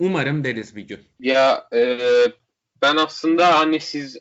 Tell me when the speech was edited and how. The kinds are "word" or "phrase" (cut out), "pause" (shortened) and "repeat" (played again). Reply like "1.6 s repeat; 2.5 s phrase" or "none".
1.1 s pause